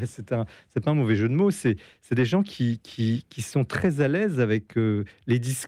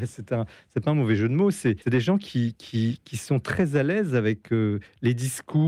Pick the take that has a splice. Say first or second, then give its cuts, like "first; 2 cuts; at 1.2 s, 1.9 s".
second; 1 cut; at 1.8 s